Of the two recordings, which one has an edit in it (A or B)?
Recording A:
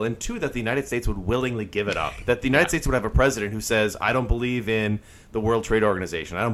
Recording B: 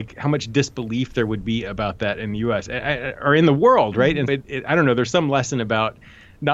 B